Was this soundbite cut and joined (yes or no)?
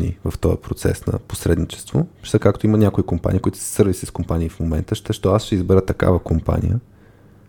yes